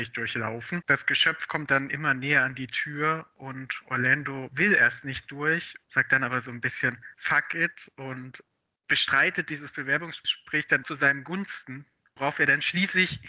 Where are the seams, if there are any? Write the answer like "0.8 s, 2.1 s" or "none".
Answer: 10.8 s